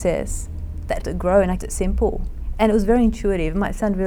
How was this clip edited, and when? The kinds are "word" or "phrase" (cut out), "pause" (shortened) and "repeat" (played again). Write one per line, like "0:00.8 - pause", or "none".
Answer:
0:01.0 - word
0:01.6 - word